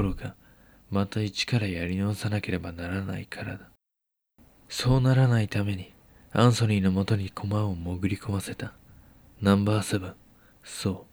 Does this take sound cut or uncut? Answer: uncut